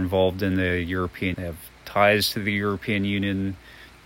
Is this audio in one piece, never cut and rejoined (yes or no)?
no